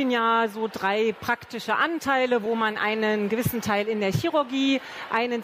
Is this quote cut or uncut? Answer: uncut